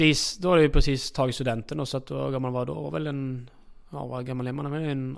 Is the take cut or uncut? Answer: cut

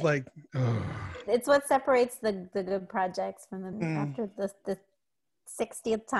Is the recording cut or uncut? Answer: cut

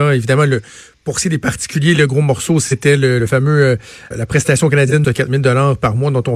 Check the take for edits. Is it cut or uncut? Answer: cut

